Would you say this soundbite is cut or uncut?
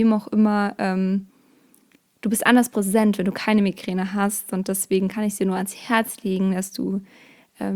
uncut